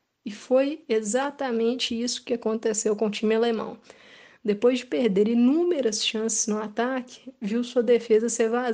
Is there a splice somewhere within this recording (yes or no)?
no